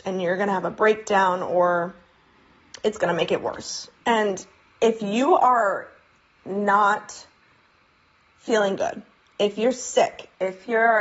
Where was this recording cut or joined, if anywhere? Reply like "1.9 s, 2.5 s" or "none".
3.9 s